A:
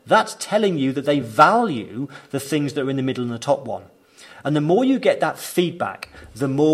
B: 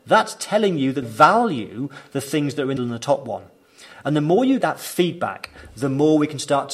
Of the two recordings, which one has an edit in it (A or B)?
B